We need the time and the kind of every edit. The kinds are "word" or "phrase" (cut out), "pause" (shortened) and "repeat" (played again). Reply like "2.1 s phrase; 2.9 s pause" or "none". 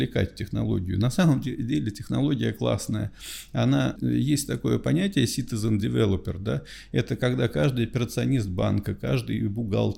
4.0 s word